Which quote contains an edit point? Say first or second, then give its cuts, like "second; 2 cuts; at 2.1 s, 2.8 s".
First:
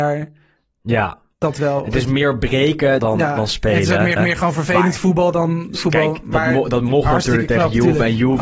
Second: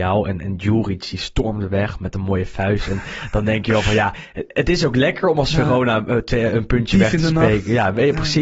first; 3 cuts; at 3.0 s, 4.2 s, 5.8 s